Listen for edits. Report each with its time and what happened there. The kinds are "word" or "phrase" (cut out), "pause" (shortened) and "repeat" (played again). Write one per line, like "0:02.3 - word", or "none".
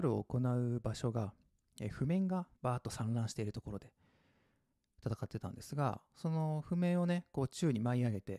0:02.5 - pause
0:06.1 - pause